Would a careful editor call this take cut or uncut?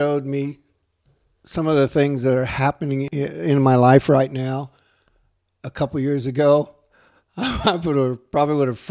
uncut